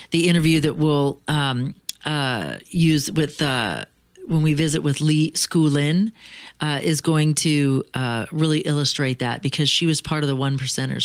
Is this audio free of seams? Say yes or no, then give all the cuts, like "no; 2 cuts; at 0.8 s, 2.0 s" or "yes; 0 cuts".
yes; 0 cuts